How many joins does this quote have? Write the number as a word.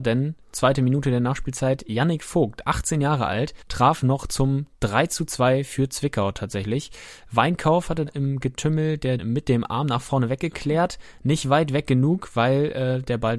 three